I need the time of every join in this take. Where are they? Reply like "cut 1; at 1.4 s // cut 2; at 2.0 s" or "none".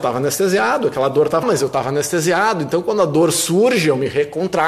cut 1; at 1.4 s